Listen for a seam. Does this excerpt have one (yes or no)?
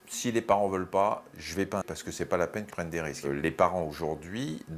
yes